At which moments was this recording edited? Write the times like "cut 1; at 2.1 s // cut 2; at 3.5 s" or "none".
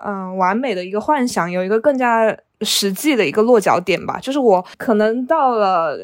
cut 1; at 2.5 s